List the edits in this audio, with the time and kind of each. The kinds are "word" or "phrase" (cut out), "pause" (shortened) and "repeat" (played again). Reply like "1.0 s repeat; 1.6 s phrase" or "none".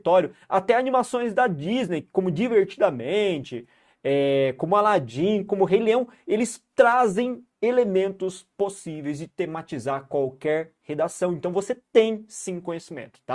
7.5 s pause